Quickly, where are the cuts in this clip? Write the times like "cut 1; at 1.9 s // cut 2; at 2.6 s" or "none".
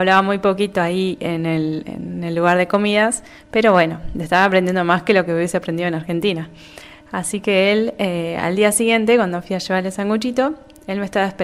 none